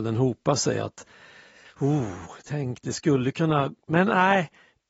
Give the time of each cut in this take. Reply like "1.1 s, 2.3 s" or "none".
none

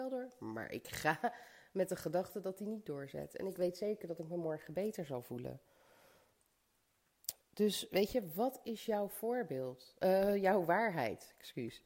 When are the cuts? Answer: none

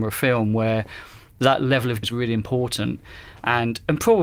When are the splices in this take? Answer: 2.0 s

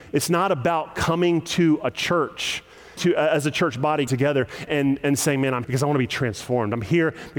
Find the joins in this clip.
3.0 s, 4.1 s, 4.7 s, 5.6 s

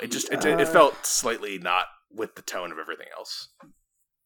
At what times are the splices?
none

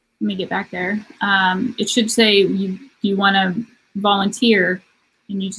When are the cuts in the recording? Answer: none

